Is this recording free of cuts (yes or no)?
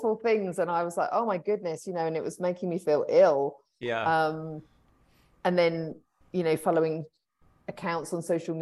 yes